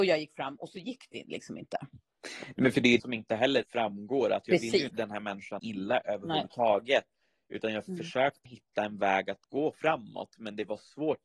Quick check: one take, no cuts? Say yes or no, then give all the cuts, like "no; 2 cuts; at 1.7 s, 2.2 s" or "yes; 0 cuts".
no; 6 cuts; at 3.0 s, 3.6 s, 4.9 s, 5.6 s, 8.5 s, 9.7 s